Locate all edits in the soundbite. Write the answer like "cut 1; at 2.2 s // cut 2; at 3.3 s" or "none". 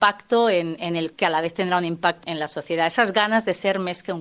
cut 1; at 1.1 s // cut 2; at 2.2 s